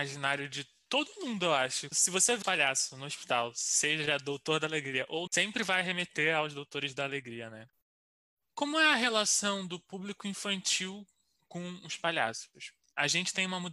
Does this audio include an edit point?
yes; 3 cuts; at 1.9 s, 2.4 s, 5.3 s

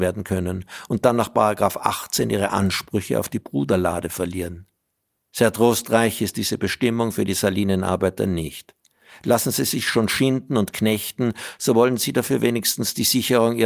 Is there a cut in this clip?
no; 0 cuts

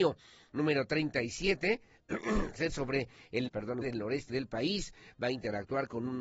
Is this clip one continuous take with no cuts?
no; 4 cuts; at 2.7 s, 3.5 s, 3.8 s, 4.3 s

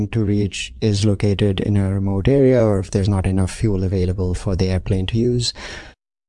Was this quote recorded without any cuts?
yes; 0 cuts

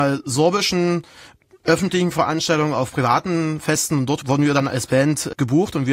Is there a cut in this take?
no; 0 cuts

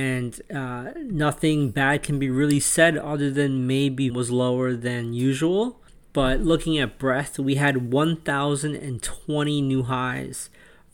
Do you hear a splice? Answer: yes; 2 cuts; at 4.1 s, 5.9 s

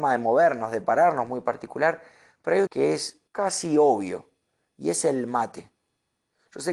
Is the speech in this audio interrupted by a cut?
yes; 2 cuts; at 2.7 s, 3.3 s

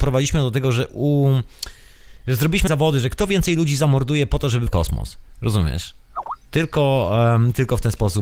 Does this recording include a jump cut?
yes; 3 cuts; at 2.7 s, 4.7 s, 6.4 s

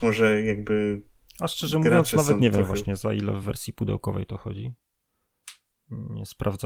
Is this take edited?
no; 0 cuts

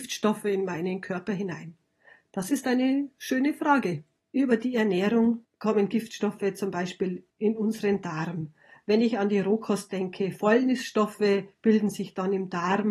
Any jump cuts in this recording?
no; 0 cuts

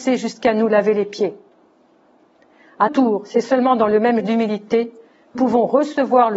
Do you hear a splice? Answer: yes; 3 cuts; at 2.9 s, 4.2 s, 5.3 s

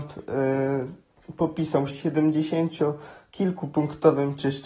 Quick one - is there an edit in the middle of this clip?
yes; 1 cut; at 1.9 s

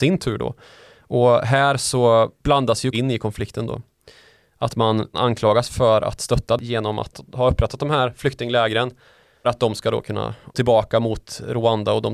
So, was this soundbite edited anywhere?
yes; 5 cuts; at 2.9 s, 5.1 s, 6.6 s, 9.4 s, 10.5 s

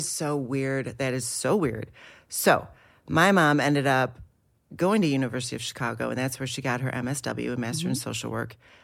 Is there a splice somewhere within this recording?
no; 0 cuts

